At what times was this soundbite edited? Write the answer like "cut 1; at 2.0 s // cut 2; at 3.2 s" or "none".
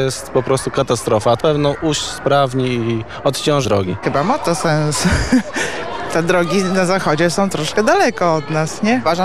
cut 1; at 1.4 s // cut 2; at 3.6 s

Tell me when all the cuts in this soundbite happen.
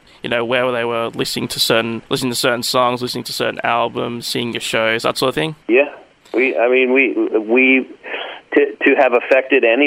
cut 1; at 2.1 s // cut 2; at 5.6 s

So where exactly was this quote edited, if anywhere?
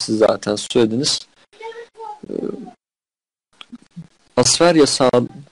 none

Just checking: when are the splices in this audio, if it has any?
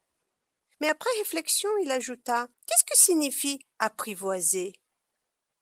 cut 1; at 2.5 s // cut 2; at 3.7 s

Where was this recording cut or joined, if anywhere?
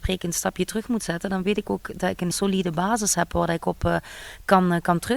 cut 1; at 2.3 s

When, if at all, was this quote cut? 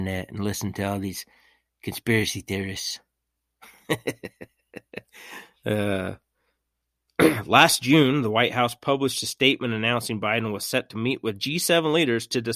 none

